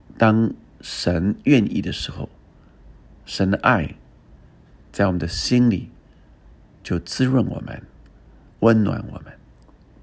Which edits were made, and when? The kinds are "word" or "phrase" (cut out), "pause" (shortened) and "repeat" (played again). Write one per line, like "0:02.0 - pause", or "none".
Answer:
none